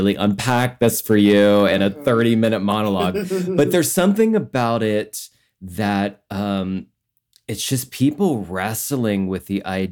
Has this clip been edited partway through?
no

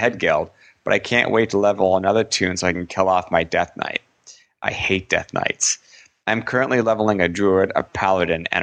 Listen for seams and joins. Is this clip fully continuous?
yes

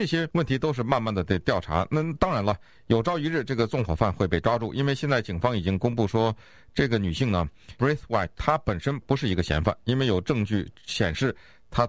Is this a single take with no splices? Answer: no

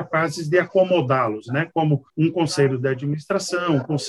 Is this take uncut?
no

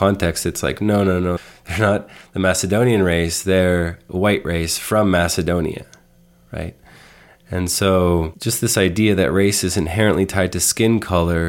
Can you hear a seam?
no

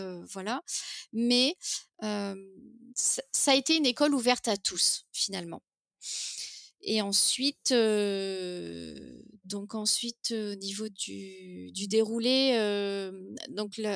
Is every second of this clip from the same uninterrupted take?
yes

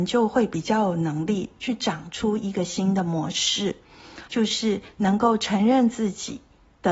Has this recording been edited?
yes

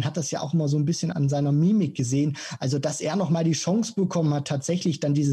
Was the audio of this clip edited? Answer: yes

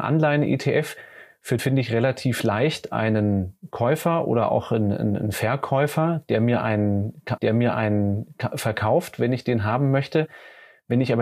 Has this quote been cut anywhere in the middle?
yes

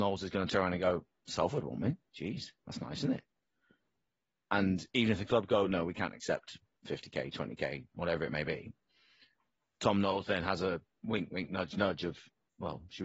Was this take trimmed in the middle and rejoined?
no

